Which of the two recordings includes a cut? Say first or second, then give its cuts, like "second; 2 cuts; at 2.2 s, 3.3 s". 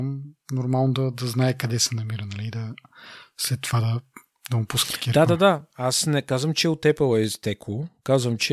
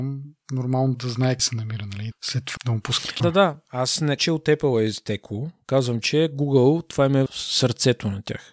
second; 7 cuts; at 0.9 s, 1.4 s, 2.1 s, 2.6 s, 3.2 s, 4.2 s, 7.3 s